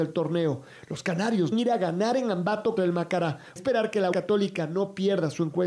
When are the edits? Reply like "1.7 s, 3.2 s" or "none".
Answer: 1.5 s, 2.8 s, 3.6 s, 4.1 s